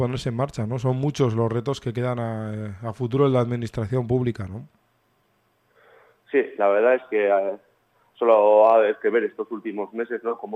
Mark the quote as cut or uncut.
uncut